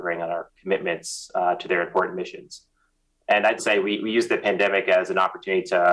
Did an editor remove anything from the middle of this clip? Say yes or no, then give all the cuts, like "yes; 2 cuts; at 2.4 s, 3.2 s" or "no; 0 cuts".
yes; 1 cut; at 3.6 s